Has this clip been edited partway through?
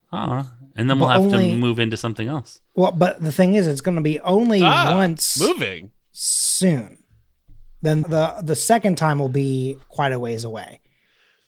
yes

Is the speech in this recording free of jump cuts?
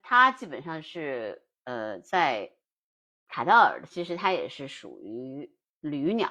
yes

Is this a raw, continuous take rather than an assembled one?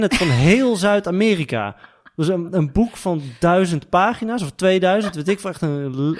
yes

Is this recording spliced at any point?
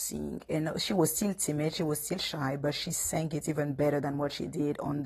no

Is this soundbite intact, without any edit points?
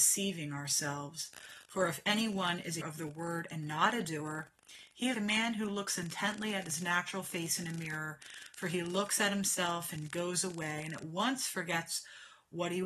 no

